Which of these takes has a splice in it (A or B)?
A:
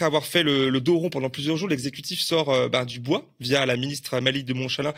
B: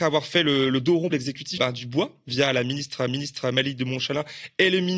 B